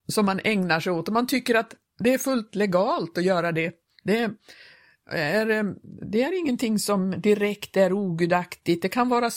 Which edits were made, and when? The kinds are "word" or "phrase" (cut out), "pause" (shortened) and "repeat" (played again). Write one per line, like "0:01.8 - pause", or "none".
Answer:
none